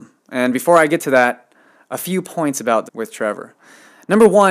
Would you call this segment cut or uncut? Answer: cut